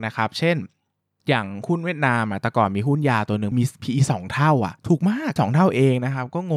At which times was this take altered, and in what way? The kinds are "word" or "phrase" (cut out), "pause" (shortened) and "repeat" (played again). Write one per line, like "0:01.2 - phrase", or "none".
0:03.5 - word
0:04.8 - pause
0:05.4 - word